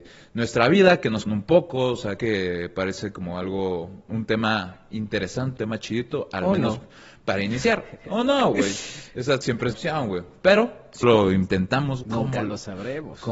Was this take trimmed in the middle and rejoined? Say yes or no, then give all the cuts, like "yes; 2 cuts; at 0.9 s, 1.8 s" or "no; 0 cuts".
yes; 8 cuts; at 1.3 s, 2.2 s, 4.1 s, 5.6 s, 9.4 s, 9.7 s, 11.0 s, 12.0 s